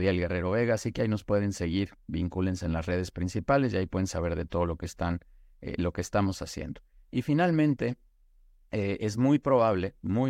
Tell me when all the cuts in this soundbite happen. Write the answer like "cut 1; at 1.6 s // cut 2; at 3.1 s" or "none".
none

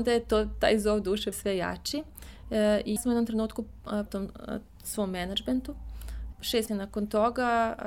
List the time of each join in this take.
cut 1; at 1.3 s // cut 2; at 3.0 s // cut 3; at 4.1 s // cut 4; at 6.3 s // cut 5; at 6.7 s

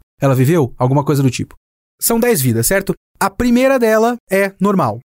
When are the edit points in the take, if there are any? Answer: none

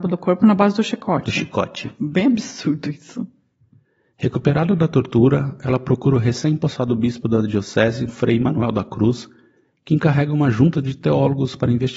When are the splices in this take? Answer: cut 1; at 8.1 s

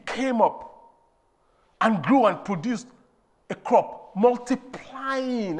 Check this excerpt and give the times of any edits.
none

